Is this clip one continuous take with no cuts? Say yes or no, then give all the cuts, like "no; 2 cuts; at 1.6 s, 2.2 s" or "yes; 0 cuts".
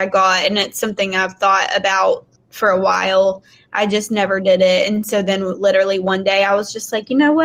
yes; 0 cuts